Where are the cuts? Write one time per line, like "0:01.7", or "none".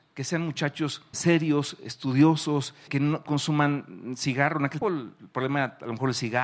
0:01.1
0:02.9
0:03.2
0:04.8